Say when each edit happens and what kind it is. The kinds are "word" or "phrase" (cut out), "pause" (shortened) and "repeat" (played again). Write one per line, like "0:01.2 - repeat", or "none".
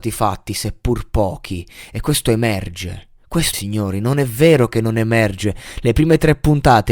0:03.5 - word